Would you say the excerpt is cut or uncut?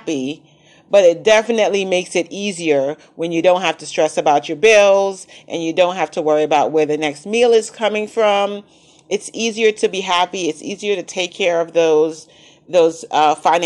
uncut